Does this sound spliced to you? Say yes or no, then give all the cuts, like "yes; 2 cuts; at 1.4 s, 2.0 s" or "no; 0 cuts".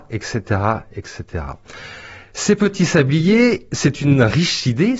no; 0 cuts